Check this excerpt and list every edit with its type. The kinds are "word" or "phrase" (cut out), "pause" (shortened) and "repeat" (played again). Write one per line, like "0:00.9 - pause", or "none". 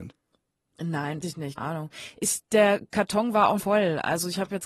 0:01.2 - word
0:01.6 - word
0:03.6 - word